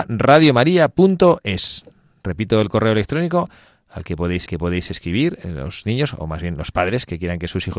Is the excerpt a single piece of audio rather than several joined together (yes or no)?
no